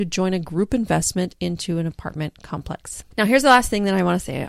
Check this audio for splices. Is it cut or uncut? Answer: cut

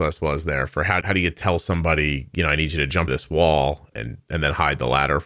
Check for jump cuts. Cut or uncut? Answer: cut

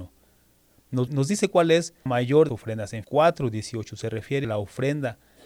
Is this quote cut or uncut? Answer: cut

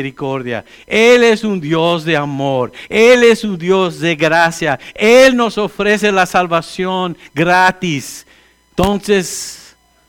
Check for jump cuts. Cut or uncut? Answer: uncut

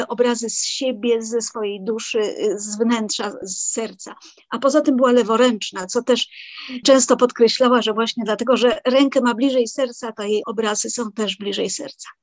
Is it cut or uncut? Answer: uncut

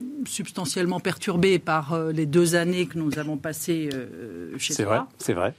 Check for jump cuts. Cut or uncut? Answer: uncut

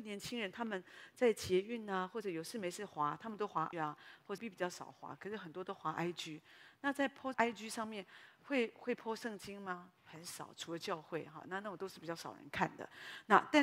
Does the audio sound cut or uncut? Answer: cut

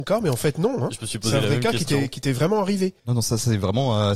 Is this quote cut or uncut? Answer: cut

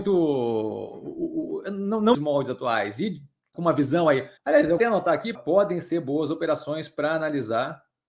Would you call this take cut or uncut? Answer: cut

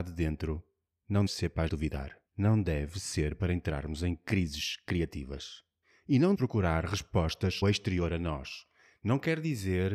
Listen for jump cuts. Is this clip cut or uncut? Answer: cut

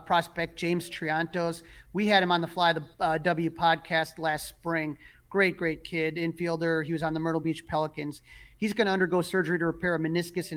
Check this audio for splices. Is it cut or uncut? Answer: uncut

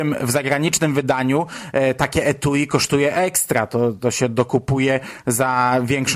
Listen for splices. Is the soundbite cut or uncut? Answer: uncut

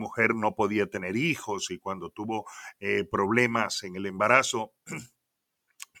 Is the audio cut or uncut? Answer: uncut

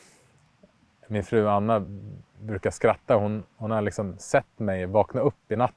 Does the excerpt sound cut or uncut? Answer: uncut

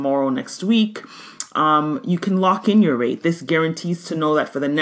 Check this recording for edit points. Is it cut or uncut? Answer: uncut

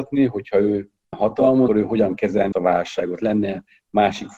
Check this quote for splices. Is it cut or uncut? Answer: cut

